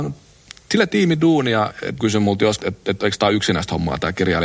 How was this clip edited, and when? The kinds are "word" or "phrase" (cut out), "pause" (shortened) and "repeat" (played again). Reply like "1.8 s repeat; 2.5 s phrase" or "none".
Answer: 2.0 s word; 2.6 s word